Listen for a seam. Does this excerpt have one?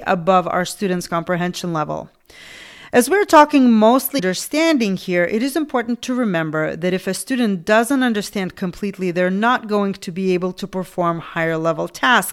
yes; 1 cut; at 4.2 s

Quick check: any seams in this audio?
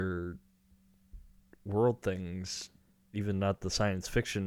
no; 0 cuts

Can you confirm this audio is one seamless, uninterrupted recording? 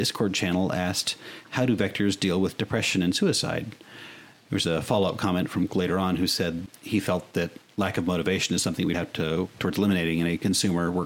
no; 4 cuts; at 5.7 s, 6.7 s, 8.9 s, 9.6 s

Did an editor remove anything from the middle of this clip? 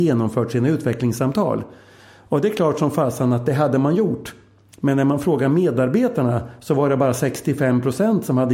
no; 0 cuts

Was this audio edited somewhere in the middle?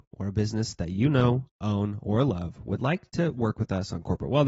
no; 0 cuts

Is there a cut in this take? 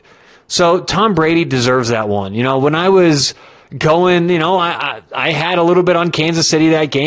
no; 0 cuts

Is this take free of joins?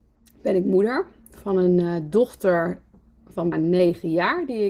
no; 1 cut; at 3.5 s

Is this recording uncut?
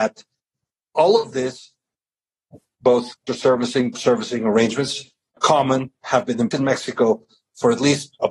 no; 4 cuts; at 3.3 s, 3.9 s, 5.4 s, 6.5 s

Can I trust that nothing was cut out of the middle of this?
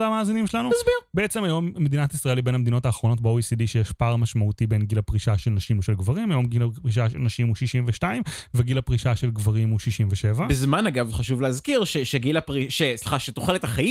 yes; 0 cuts

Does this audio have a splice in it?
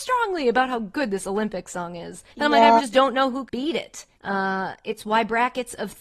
yes; 4 cuts; at 2.3 s, 2.8 s, 3.5 s, 4.1 s

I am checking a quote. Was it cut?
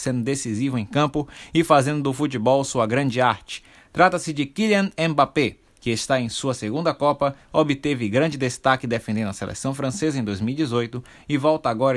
no; 0 cuts

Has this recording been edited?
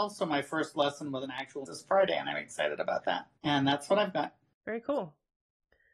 yes; 2 cuts; at 1.7 s, 3.4 s

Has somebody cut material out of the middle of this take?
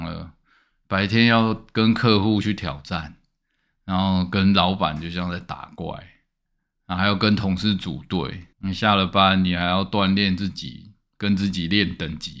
yes; 1 cut; at 8.5 s

